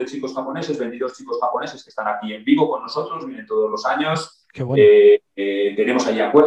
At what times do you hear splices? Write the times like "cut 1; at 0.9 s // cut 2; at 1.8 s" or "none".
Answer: cut 1; at 5.3 s

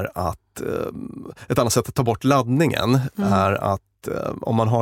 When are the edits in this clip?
none

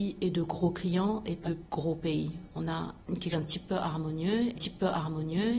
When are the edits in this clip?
cut 1; at 1.4 s // cut 2; at 3.3 s // cut 3; at 4.5 s

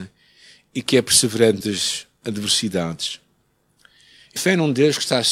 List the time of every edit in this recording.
cut 1; at 1.6 s // cut 2; at 4.4 s

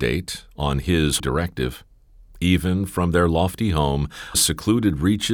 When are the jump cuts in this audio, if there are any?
cut 1; at 1.2 s // cut 2; at 4.3 s

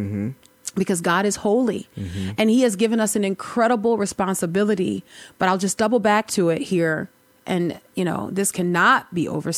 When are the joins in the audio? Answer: none

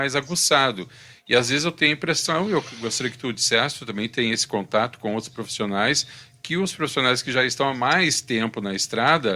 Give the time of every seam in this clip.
none

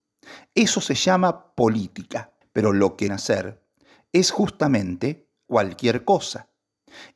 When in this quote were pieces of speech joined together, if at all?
cut 1; at 2.4 s // cut 2; at 3.1 s // cut 3; at 5.5 s

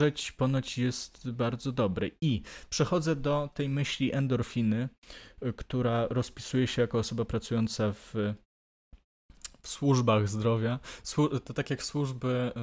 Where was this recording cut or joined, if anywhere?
none

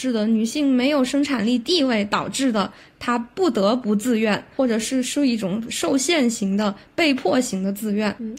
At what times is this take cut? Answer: none

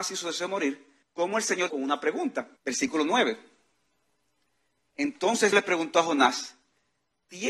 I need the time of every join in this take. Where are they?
cut 1; at 1.0 s // cut 2; at 1.7 s // cut 3; at 2.6 s // cut 4; at 5.5 s

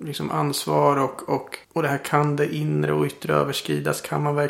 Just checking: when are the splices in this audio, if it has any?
cut 1; at 1.6 s

